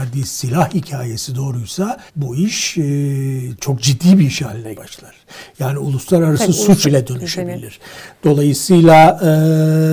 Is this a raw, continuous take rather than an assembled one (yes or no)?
no